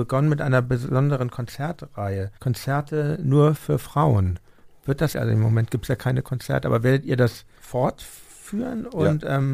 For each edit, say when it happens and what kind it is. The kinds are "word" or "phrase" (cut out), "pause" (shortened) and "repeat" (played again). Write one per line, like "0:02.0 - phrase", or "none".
0:02.4 - pause
0:04.8 - pause
0:05.1 - word
0:07.5 - pause